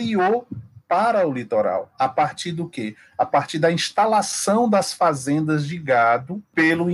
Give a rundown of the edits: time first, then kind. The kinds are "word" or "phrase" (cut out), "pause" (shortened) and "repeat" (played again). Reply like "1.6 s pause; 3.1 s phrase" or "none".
none